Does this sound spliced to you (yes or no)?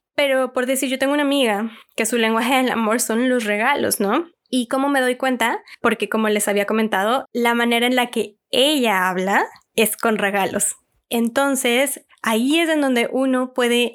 yes